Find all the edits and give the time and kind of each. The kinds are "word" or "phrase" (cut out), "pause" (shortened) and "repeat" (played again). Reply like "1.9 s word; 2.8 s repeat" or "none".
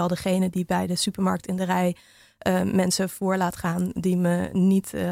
none